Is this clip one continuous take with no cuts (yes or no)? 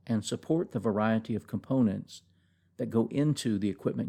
yes